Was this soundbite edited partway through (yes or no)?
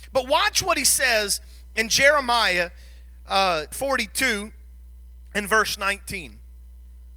yes